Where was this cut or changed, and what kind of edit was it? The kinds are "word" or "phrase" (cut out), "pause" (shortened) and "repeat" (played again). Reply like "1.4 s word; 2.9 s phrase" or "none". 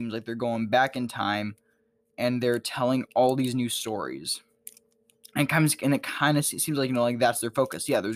none